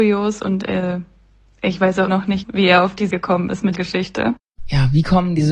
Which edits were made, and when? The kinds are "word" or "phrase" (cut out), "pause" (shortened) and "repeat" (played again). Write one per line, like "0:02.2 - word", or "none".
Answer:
0:02.1 - word
0:02.4 - word
0:03.1 - word
0:03.8 - word